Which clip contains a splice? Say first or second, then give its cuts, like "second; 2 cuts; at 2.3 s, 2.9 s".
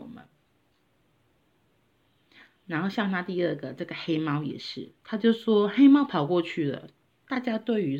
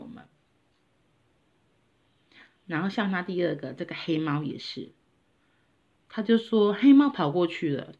first; 1 cut; at 5.0 s